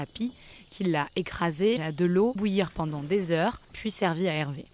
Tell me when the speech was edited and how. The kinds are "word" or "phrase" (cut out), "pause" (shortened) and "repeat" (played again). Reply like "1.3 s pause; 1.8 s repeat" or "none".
1.8 s word; 2.4 s word; 3.6 s pause